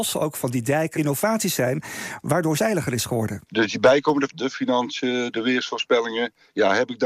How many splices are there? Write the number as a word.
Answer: five